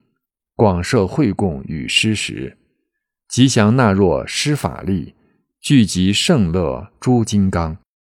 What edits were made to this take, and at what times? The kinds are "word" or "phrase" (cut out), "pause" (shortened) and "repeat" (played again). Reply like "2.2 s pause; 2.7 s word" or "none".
none